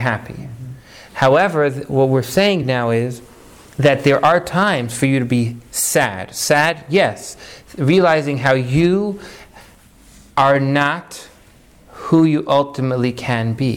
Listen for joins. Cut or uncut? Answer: uncut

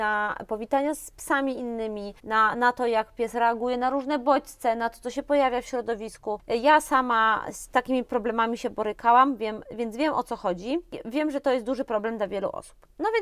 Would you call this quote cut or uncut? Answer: cut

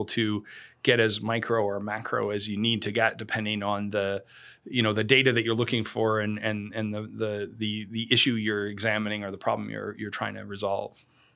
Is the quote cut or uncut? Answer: uncut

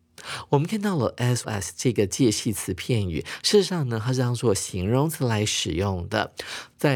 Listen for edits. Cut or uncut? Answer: cut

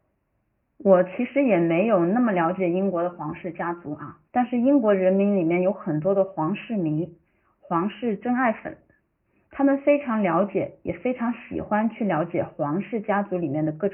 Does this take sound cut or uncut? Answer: cut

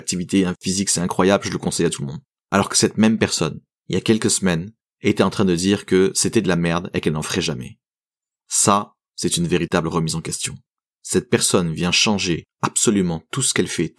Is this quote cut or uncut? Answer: uncut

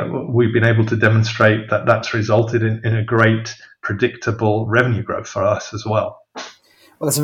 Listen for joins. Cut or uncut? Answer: uncut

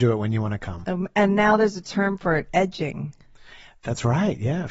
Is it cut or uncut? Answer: uncut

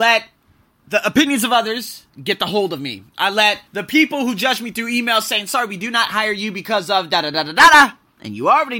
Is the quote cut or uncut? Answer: cut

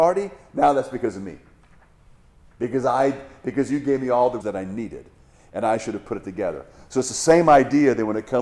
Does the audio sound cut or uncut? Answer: cut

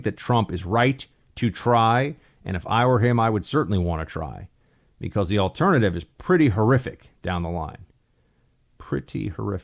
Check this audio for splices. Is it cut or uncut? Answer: uncut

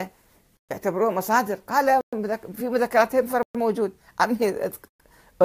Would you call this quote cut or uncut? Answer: uncut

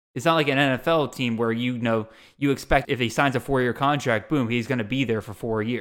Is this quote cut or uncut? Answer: cut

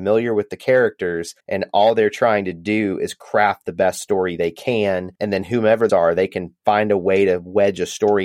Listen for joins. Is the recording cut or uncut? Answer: cut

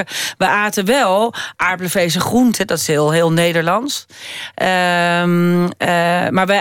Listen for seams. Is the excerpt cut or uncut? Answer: uncut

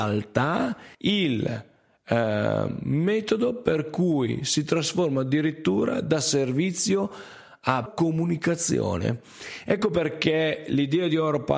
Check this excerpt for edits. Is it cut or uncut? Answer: cut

